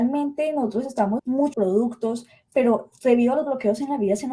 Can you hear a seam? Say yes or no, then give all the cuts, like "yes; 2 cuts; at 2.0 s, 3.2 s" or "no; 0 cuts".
yes; 2 cuts; at 1.2 s, 1.5 s